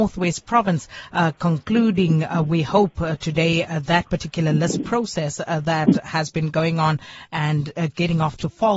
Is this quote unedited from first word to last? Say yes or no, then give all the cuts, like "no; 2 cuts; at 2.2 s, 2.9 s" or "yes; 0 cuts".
yes; 0 cuts